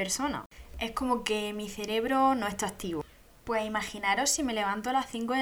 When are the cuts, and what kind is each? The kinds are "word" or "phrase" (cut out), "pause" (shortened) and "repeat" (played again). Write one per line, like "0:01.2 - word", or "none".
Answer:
none